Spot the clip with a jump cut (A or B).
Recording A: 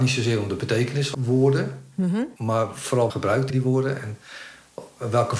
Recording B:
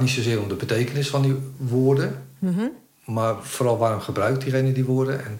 A